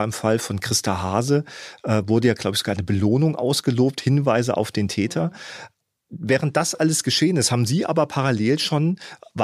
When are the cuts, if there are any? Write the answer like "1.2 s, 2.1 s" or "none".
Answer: 5.8 s